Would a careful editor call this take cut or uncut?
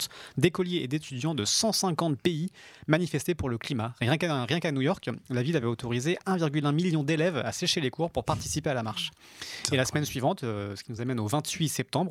uncut